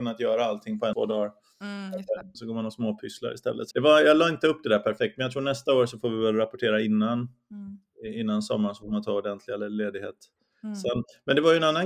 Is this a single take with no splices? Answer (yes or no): no